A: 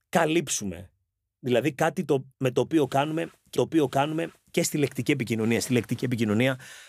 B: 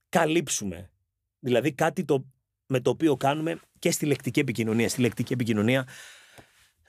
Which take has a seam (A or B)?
A